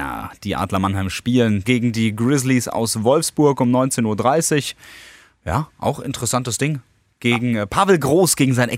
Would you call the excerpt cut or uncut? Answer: cut